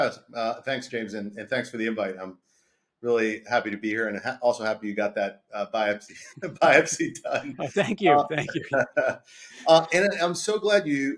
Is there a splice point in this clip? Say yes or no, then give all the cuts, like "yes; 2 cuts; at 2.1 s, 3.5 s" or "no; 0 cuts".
no; 0 cuts